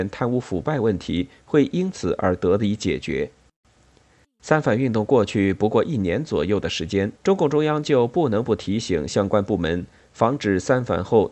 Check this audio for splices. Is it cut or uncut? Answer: cut